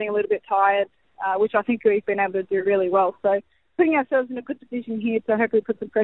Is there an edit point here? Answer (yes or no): no